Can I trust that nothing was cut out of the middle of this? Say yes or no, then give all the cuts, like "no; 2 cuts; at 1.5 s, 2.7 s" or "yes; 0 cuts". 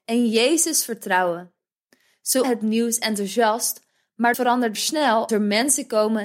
no; 4 cuts; at 2.4 s, 4.3 s, 4.7 s, 5.3 s